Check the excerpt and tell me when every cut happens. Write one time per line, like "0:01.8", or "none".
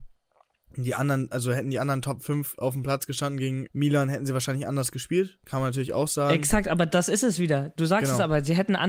0:03.7